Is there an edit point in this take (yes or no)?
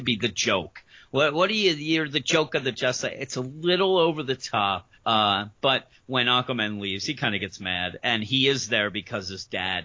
yes